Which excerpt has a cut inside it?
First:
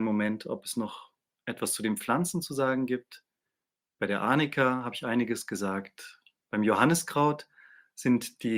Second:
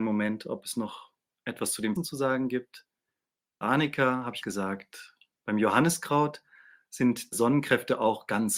second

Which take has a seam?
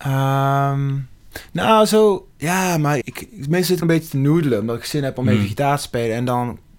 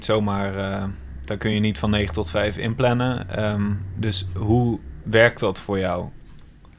first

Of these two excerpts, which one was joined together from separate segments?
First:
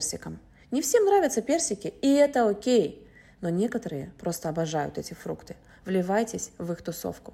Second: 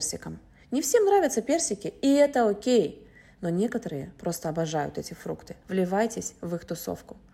second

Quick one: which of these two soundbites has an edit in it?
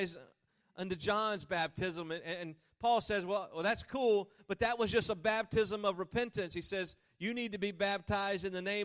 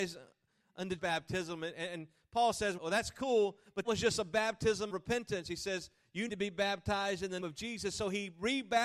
second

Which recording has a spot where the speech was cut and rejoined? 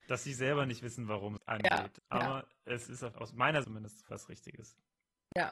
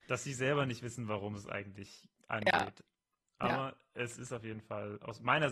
first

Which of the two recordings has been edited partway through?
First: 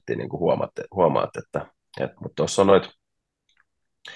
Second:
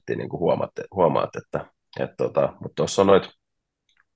first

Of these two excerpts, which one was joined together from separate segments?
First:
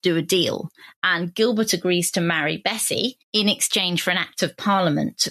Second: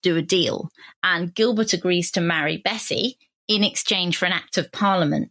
first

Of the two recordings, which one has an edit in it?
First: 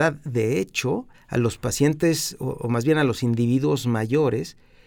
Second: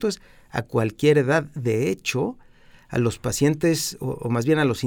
first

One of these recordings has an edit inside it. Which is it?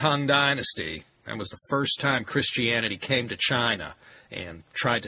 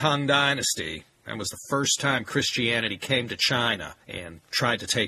second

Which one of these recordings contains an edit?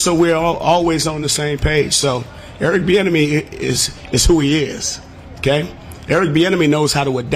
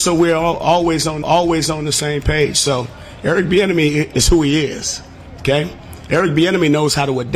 second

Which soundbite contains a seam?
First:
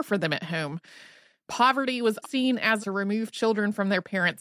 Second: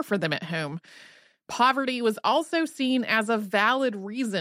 first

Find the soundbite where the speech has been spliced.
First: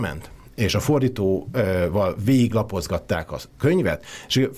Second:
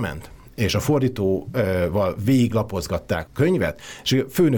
second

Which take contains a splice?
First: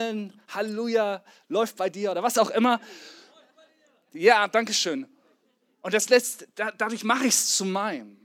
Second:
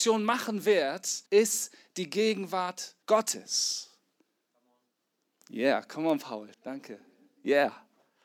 second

